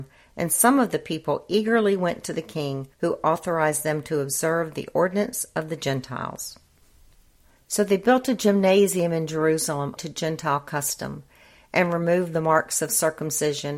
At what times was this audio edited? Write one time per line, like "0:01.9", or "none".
0:02.9
0:10.0